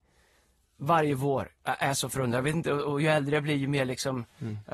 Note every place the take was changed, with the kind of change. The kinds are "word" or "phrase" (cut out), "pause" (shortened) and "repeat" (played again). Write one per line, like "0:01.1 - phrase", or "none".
none